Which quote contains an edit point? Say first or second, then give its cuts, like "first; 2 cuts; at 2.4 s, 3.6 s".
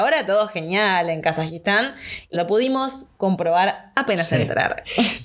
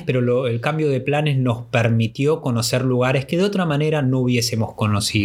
first; 1 cut; at 2.3 s